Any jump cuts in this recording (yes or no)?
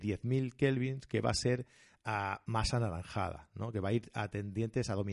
no